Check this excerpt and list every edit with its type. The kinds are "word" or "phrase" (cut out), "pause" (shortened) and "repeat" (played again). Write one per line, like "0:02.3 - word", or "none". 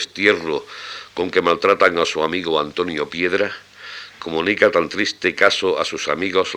none